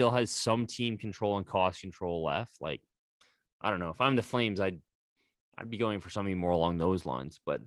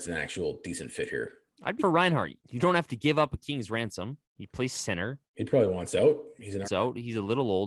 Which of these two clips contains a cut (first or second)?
second